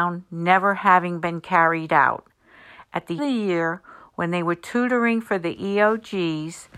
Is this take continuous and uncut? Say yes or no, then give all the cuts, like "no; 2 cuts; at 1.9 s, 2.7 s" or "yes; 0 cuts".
no; 1 cut; at 3.2 s